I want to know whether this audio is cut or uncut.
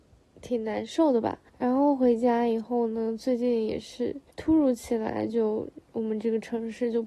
cut